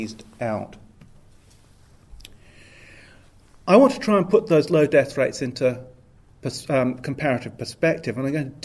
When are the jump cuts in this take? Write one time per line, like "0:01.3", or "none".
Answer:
none